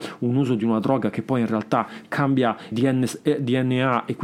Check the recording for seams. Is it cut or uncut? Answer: cut